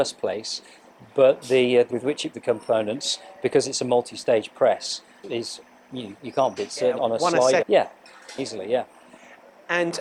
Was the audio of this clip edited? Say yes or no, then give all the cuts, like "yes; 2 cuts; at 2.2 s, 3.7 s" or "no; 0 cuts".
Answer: yes; 8 cuts; at 1.9 s, 2.3 s, 5.2 s, 6.2 s, 6.6 s, 7.0 s, 7.6 s, 8.4 s